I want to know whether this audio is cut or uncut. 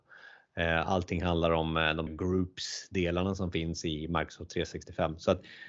cut